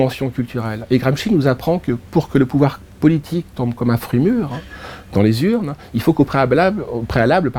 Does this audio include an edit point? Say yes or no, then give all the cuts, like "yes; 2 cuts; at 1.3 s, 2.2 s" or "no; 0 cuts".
no; 0 cuts